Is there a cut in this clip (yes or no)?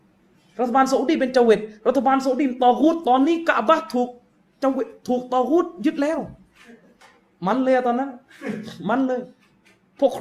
no